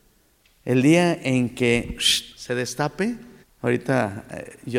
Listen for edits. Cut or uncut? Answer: cut